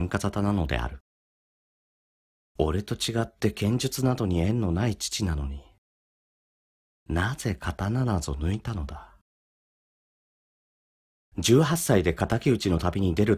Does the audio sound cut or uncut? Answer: uncut